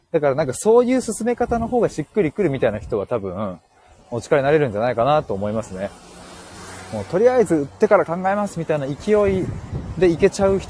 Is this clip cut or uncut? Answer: uncut